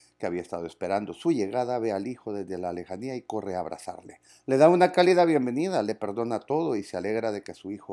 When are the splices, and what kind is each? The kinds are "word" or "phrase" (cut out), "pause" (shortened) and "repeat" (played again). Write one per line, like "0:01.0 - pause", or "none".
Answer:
0:04.3 - pause